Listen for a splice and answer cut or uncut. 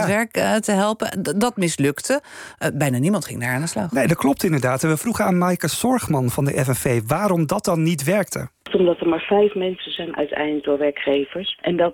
cut